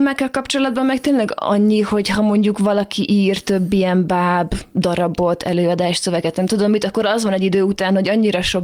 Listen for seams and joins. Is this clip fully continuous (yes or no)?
yes